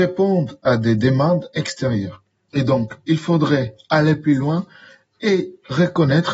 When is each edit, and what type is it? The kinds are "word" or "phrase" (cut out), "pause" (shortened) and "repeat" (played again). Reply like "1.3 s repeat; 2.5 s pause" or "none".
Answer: none